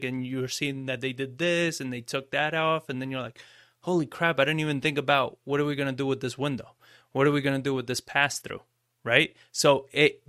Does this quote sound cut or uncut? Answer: uncut